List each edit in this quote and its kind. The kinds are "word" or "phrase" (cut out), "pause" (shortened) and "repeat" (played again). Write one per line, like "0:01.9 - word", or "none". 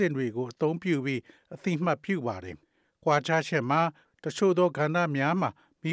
0:02.6 - pause